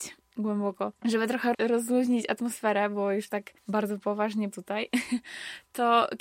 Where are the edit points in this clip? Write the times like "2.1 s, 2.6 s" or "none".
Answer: 1.0 s, 1.5 s, 3.6 s, 4.5 s